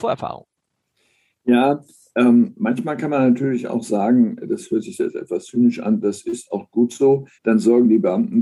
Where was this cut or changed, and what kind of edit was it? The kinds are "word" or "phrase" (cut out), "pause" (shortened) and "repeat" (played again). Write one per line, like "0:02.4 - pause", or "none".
0:07.3 - pause